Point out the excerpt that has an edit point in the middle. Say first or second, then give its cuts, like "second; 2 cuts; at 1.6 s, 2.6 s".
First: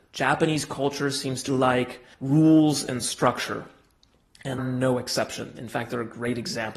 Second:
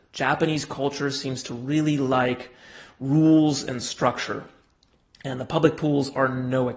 first; 3 cuts; at 1.5 s, 2.1 s, 4.6 s